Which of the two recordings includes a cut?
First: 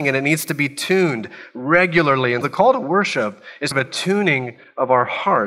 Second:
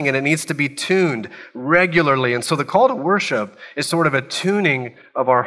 first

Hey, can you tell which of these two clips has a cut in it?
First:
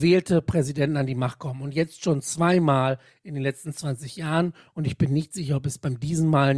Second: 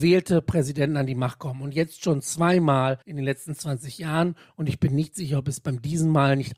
second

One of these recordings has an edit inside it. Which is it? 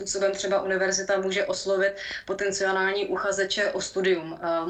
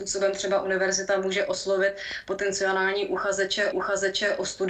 second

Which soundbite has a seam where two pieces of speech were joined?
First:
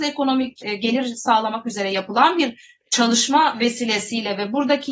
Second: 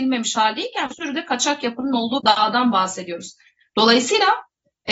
second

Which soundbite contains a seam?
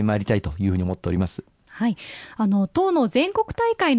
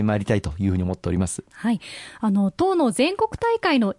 second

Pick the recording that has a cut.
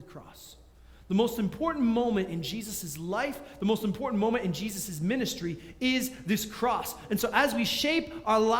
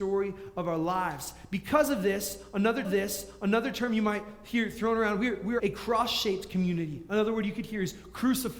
second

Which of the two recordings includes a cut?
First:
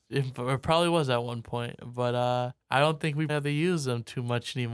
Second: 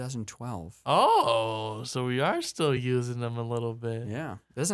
first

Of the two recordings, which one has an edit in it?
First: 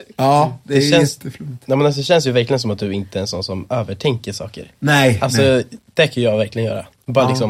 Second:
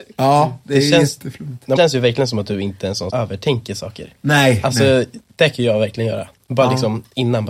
second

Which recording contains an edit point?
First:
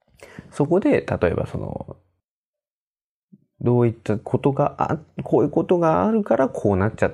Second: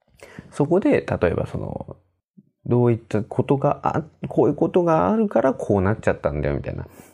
second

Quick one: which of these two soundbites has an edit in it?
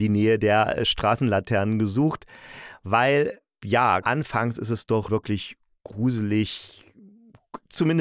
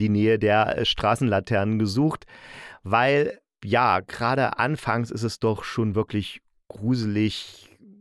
first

